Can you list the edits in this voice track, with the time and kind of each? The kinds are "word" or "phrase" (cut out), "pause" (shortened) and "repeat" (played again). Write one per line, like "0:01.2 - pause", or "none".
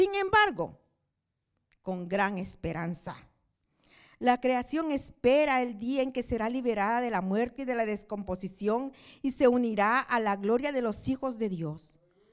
none